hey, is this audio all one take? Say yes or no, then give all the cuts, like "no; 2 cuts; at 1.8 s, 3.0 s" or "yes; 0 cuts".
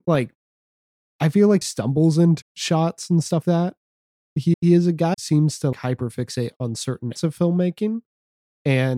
no; 7 cuts; at 1.6 s, 2.4 s, 3.4 s, 4.5 s, 5.1 s, 5.7 s, 7.2 s